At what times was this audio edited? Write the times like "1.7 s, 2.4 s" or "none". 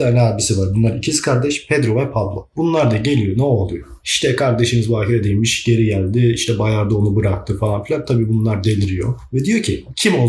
3.4 s